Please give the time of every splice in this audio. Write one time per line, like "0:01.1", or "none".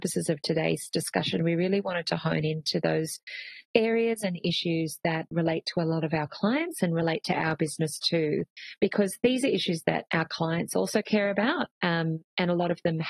0:03.7
0:11.7